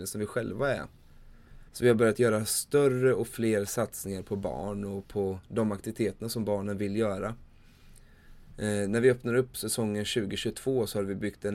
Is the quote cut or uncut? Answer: cut